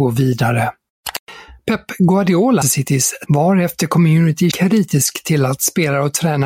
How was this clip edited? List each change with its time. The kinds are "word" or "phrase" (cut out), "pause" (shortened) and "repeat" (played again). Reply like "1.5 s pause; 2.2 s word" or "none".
2.6 s word; 3.3 s word; 4.5 s word